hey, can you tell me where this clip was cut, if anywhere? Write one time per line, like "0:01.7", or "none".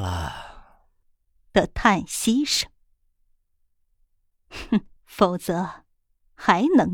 0:05.0